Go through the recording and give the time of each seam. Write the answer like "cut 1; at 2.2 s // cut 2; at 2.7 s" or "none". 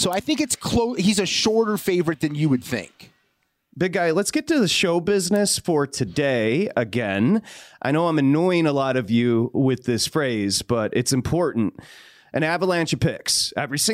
none